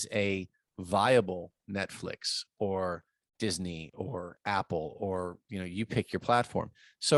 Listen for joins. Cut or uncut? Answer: uncut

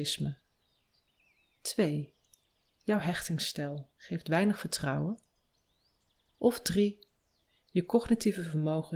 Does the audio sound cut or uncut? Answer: uncut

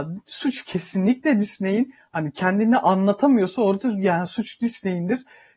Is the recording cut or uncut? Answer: uncut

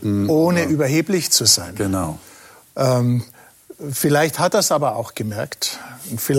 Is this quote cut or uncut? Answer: uncut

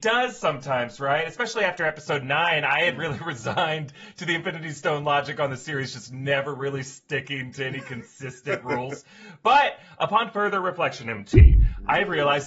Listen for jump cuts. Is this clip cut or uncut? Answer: uncut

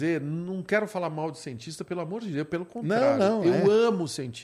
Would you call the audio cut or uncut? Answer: uncut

